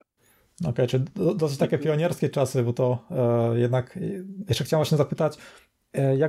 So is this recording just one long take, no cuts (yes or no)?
yes